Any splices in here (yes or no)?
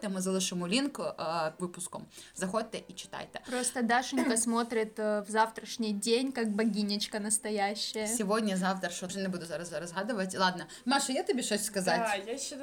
yes